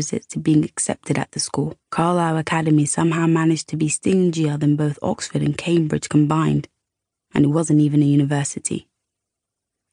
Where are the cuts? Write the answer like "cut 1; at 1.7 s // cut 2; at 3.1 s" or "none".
cut 1; at 1.8 s